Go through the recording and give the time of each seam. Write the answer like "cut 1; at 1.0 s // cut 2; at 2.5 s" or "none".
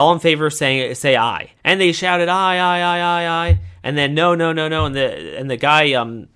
cut 1; at 1.6 s